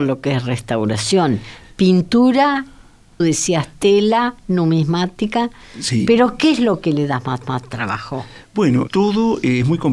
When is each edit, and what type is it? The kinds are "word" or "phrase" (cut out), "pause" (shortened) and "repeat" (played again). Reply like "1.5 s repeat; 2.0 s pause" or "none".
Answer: 3.2 s word; 7.4 s repeat; 8.9 s phrase